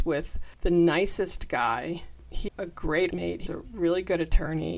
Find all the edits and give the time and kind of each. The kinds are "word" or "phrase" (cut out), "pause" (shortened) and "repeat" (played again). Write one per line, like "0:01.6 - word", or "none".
0:02.5 - word
0:03.1 - word
0:03.5 - word